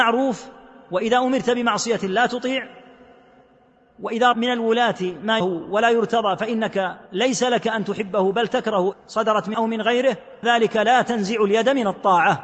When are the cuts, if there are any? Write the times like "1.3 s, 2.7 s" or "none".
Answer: 4.3 s, 5.4 s, 7.1 s, 8.9 s, 9.5 s, 10.4 s